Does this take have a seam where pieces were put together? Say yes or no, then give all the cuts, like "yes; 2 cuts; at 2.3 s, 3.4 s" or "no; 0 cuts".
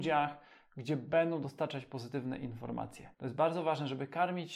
yes; 1 cut; at 3.1 s